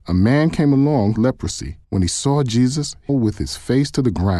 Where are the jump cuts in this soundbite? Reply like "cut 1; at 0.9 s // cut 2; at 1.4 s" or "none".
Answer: cut 1; at 1.2 s // cut 2; at 1.8 s // cut 3; at 3.1 s